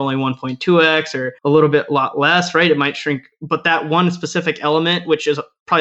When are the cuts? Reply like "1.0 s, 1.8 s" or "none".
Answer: 1.4 s